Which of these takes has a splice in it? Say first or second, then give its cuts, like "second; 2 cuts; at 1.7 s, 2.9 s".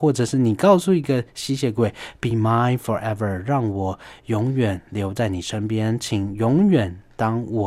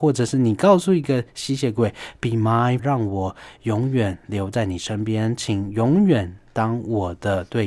second; 1 cut; at 2.8 s